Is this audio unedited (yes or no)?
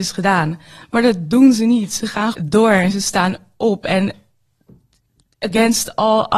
no